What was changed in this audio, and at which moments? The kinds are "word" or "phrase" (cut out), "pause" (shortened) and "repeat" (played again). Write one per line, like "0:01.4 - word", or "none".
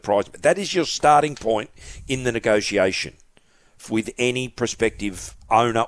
none